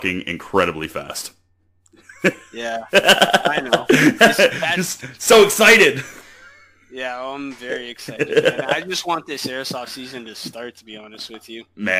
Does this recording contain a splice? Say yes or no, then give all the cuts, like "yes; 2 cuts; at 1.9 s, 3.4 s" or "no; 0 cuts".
no; 0 cuts